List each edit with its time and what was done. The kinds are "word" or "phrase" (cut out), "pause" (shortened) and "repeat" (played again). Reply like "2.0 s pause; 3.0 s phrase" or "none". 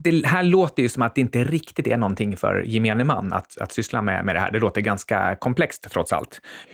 none